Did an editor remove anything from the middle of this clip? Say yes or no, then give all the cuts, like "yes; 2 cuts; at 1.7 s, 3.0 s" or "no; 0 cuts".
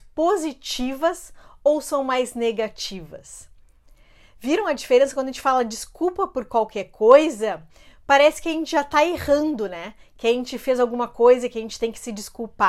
no; 0 cuts